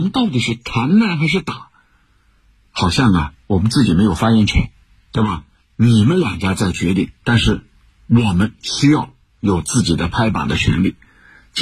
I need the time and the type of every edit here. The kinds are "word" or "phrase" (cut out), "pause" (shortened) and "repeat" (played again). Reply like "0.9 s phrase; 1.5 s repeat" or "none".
3.4 s pause; 4.8 s pause; 7.2 s pause; 7.7 s pause